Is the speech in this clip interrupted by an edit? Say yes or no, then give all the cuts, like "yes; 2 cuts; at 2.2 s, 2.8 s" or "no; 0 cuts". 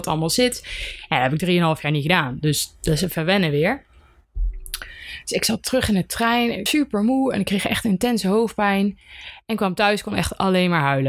yes; 1 cut; at 6.7 s